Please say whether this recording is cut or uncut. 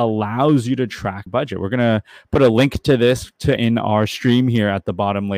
cut